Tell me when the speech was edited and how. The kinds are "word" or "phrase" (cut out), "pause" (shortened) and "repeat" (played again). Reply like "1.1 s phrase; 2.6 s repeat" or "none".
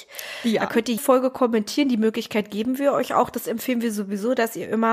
1.0 s word